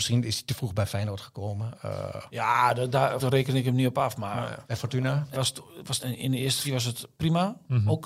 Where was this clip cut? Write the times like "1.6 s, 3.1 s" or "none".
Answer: 3.2 s, 4.6 s, 5.3 s, 6.0 s, 6.6 s